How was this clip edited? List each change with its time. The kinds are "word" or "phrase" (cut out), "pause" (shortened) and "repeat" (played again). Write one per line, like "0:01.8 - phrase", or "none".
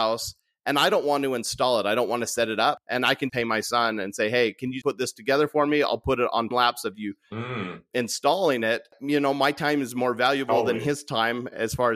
0:03.3 - word
0:04.8 - word
0:06.5 - word

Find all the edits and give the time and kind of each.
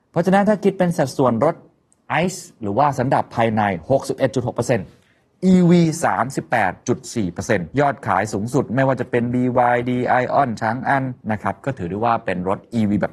0:11.2 - pause

